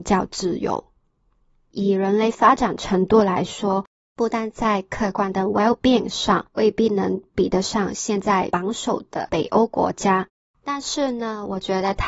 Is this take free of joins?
yes; 0 cuts

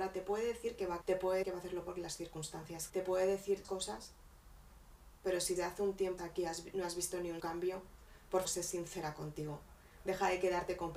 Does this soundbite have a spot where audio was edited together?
yes; 9 cuts; at 1.0 s, 1.4 s, 1.8 s, 2.9 s, 3.6 s, 5.6 s, 6.2 s, 7.4 s, 8.4 s

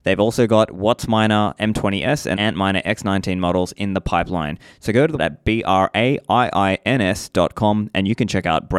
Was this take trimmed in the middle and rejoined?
yes; 2 cuts; at 2.4 s, 5.2 s

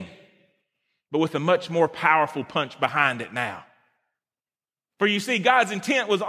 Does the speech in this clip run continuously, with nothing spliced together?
yes; 0 cuts

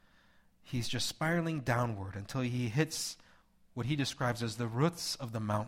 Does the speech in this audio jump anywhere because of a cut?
no; 0 cuts

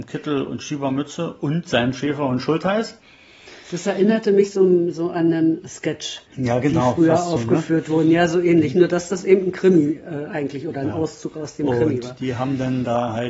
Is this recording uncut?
no; 1 cut; at 6.3 s

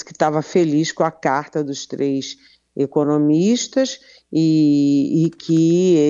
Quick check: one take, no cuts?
yes; 0 cuts

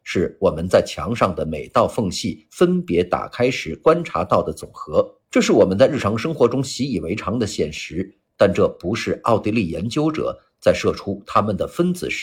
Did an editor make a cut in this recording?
yes; 1 cut; at 5.2 s

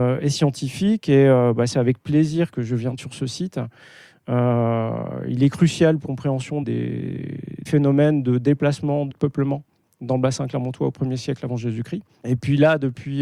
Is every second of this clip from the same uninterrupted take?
no; 6 cuts; at 2.5 s, 3.0 s, 6.0 s, 6.6 s, 7.7 s, 9.1 s

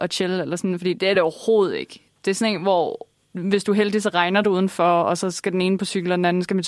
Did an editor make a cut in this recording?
no; 0 cuts

